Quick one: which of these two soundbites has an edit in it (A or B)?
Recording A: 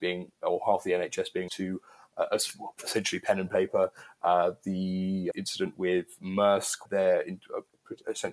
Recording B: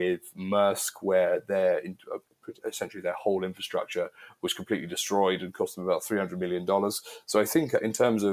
A